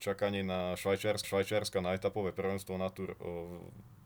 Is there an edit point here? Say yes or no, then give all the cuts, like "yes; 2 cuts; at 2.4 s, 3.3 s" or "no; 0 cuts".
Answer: yes; 1 cut; at 1.2 s